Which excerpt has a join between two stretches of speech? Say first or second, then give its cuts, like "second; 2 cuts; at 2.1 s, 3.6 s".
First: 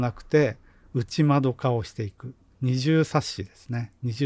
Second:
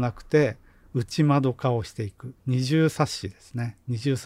second; 1 cut; at 2.4 s